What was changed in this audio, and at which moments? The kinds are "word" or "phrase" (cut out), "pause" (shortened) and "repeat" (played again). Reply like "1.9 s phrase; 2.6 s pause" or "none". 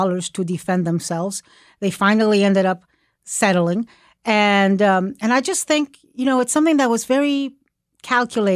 none